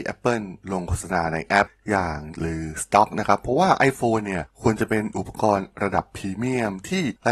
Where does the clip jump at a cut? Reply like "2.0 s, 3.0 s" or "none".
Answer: 2.3 s